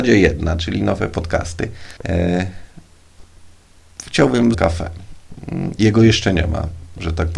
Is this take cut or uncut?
cut